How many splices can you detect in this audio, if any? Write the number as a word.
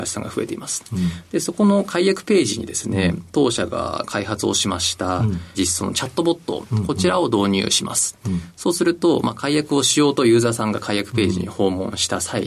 one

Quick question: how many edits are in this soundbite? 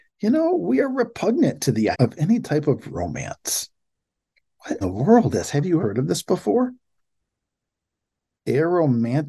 four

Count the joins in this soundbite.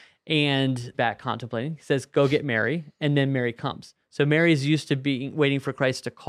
one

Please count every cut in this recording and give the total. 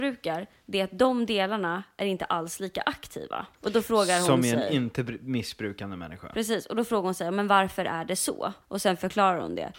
two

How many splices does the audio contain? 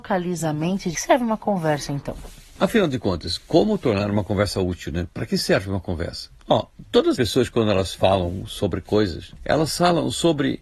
three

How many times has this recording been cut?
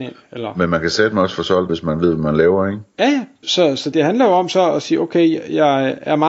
three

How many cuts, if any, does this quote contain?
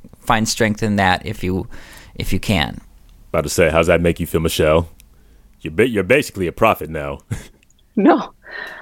zero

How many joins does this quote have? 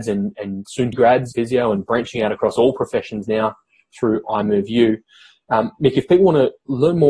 two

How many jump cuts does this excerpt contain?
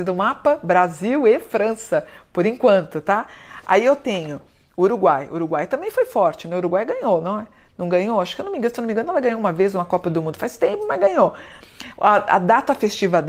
zero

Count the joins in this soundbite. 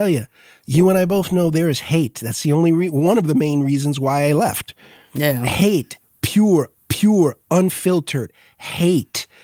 one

